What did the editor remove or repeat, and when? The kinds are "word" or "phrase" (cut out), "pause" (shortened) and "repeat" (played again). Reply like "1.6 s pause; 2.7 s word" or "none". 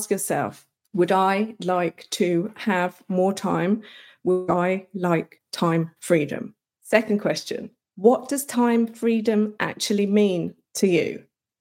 none